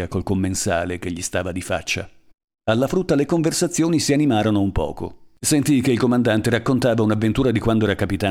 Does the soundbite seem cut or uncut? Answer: uncut